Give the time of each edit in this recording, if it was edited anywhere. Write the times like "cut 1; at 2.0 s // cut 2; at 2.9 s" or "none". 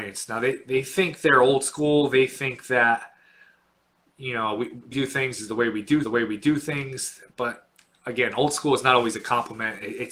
cut 1; at 4.9 s // cut 2; at 6.0 s